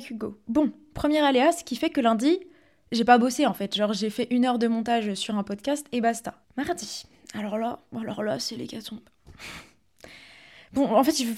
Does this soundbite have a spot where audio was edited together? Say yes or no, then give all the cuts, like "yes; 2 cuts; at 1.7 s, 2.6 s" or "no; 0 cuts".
no; 0 cuts